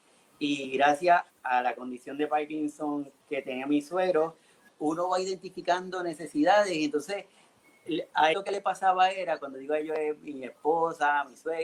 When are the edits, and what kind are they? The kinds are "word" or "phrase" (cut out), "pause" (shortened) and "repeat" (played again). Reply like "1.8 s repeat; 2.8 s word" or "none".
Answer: 1.3 s word; 3.2 s word; 4.7 s word; 8.3 s word